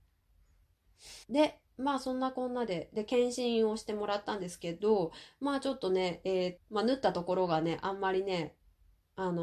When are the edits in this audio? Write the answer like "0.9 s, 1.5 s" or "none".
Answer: 1.2 s, 6.6 s